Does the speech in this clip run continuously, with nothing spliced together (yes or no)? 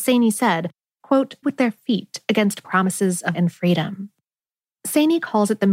no